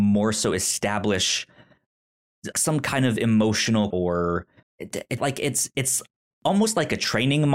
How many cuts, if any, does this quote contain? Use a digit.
4